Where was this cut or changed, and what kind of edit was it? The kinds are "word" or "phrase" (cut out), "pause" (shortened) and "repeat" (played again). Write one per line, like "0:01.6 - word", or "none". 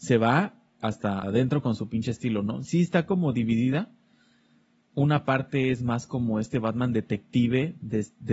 0:01.2 - word